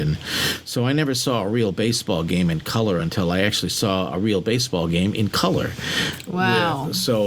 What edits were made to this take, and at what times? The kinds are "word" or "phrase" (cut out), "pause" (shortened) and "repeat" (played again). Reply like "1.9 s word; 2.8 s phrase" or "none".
none